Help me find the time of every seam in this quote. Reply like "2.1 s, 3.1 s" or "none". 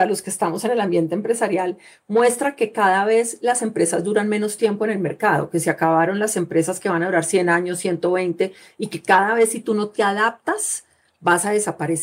none

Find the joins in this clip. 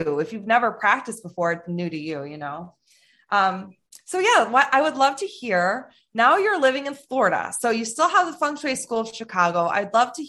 none

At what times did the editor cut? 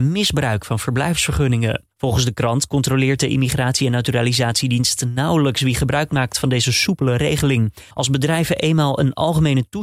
1.9 s, 7.9 s

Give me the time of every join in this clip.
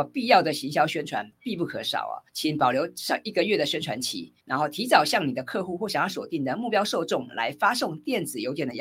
2.3 s, 4.4 s

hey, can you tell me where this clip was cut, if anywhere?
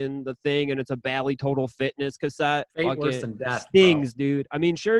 2.7 s

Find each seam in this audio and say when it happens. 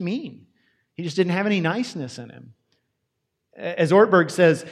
none

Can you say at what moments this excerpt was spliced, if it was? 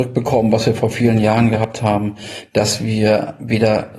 none

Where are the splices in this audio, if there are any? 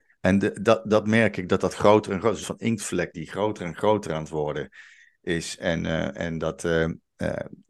2.4 s, 3.1 s

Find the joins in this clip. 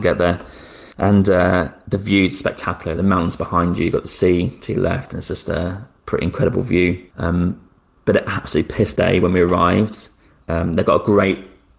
0.9 s, 3.0 s, 7.1 s, 8.9 s

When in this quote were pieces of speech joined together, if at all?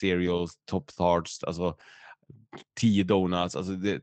none

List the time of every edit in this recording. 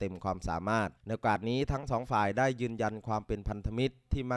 1.0 s

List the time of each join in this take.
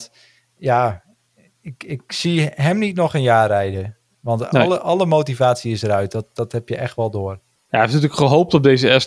none

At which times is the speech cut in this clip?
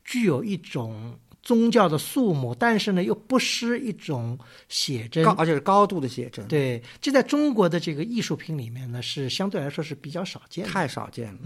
none

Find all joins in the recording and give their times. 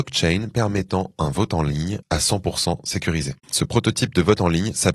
2.0 s, 3.4 s

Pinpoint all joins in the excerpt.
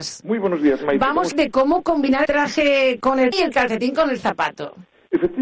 1.3 s, 2.3 s, 3.3 s

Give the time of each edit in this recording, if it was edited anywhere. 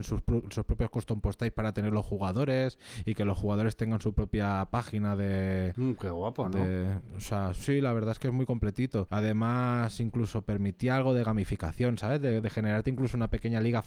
12.4 s

